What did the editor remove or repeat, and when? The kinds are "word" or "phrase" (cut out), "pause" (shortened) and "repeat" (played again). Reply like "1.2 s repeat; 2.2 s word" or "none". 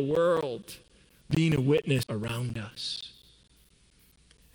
2.0 s phrase